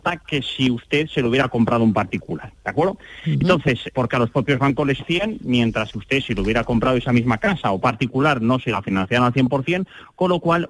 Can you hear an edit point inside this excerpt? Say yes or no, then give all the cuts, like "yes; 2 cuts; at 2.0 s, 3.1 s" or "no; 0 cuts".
yes; 4 cuts; at 3.9 s, 5.0 s, 5.9 s, 7.8 s